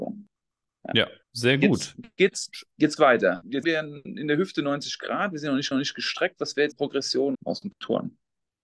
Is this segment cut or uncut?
cut